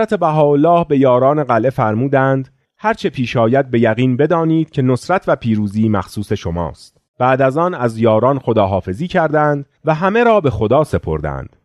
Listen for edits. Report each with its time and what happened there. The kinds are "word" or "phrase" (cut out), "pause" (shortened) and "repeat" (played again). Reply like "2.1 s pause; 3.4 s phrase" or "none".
2.6 s pause; 7.1 s pause; 9.8 s pause